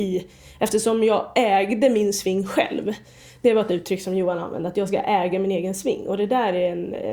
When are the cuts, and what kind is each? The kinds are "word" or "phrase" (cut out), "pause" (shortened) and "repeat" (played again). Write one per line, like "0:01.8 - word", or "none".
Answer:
none